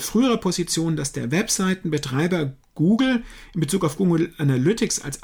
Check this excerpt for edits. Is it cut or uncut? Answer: uncut